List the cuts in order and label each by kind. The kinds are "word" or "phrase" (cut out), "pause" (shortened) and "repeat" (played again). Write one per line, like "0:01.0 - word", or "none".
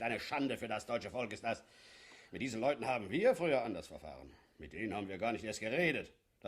none